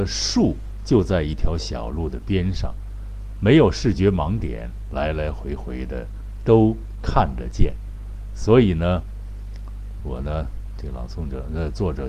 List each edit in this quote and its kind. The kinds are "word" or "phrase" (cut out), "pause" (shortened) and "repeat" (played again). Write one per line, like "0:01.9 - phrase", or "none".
0:10.0 - word

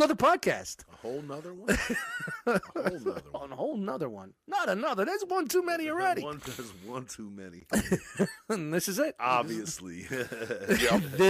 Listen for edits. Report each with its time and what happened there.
none

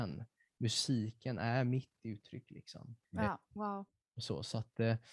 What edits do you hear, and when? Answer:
0:03.0 - pause

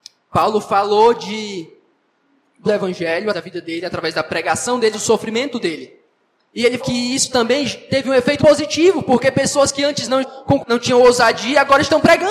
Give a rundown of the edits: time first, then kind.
0:02.6 - word
0:03.3 - word
0:04.9 - word
0:06.8 - word
0:08.4 - word
0:10.2 - word
0:10.6 - word

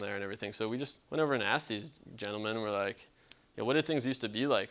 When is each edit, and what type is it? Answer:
0:01.0 - pause

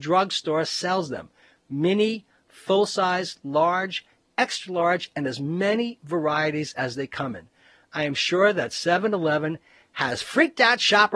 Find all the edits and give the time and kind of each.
none

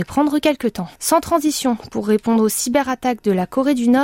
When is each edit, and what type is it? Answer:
0:01.0 - pause

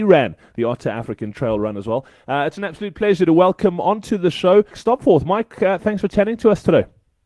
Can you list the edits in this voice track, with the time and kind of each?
0:04.7 - word

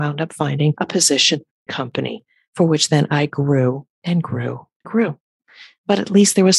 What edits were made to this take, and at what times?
0:01.7 - phrase
0:03.9 - pause
0:04.8 - word

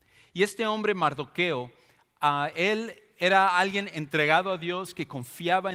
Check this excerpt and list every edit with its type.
none

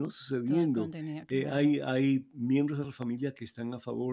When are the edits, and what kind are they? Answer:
none

